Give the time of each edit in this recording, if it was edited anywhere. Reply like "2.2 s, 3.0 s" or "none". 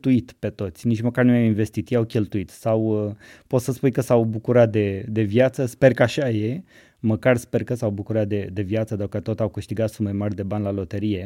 none